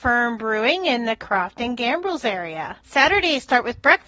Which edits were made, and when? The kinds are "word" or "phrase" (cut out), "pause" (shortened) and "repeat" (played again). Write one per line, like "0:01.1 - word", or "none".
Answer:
0:02.8 - pause